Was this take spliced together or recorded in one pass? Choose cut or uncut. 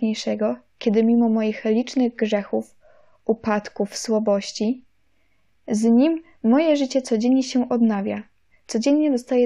uncut